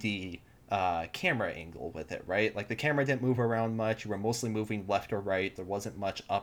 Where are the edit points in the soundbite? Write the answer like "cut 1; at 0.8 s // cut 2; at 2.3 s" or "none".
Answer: none